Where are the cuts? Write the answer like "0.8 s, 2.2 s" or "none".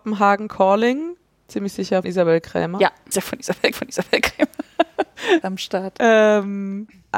1.2 s, 2.0 s, 3.1 s, 3.7 s, 5.4 s